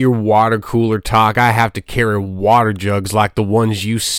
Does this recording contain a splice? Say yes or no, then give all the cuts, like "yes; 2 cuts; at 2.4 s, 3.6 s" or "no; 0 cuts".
no; 0 cuts